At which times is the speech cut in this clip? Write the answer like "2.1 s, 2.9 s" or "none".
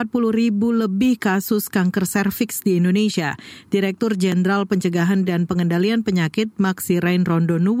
none